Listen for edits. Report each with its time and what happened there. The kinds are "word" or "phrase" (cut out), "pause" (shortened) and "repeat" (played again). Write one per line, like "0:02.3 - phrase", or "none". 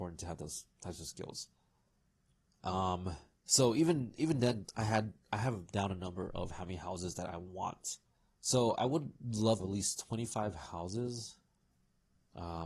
0:02.2 - pause
0:08.1 - pause
0:09.6 - phrase